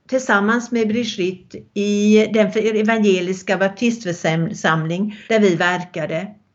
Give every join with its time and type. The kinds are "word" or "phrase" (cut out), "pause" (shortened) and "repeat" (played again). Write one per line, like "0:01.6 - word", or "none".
0:01.7 - pause
0:05.3 - pause